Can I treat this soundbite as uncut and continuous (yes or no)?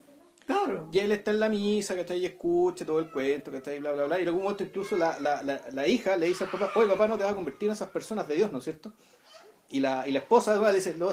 yes